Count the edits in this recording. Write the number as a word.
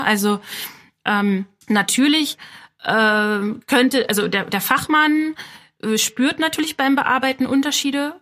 two